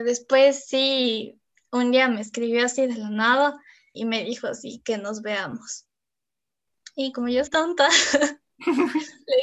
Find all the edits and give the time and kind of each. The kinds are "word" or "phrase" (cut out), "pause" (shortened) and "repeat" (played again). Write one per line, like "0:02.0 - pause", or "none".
0:03.9 - word
0:04.8 - word
0:07.1 - word
0:07.5 - word